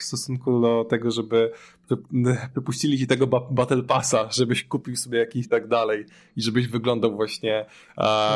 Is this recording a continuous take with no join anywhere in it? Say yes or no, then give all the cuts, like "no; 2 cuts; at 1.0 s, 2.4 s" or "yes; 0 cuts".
no; 1 cut; at 5.4 s